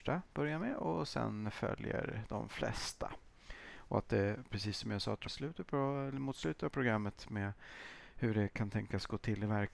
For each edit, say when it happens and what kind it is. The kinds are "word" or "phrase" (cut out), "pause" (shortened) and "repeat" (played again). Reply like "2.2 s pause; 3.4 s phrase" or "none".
5.3 s word